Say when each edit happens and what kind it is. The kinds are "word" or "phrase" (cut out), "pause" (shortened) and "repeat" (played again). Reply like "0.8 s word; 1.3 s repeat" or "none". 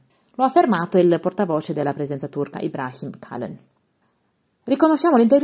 none